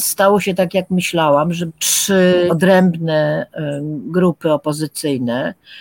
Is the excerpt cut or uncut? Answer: cut